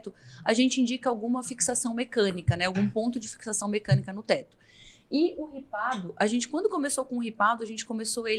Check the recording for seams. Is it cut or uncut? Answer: uncut